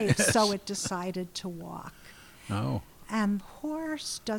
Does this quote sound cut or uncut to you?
cut